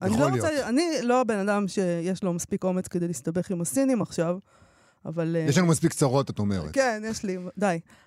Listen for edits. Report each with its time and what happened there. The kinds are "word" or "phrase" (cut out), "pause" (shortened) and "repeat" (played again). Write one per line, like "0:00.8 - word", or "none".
none